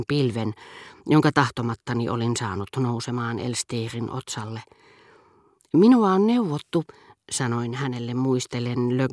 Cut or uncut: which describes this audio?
uncut